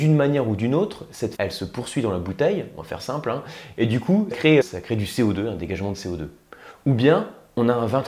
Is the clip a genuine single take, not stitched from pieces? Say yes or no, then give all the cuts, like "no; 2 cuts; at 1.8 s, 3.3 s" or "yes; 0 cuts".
no; 3 cuts; at 1.4 s, 4.3 s, 4.6 s